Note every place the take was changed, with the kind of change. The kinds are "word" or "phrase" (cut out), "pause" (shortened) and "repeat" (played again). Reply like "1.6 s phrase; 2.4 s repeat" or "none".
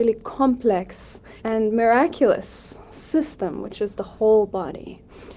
1.4 s pause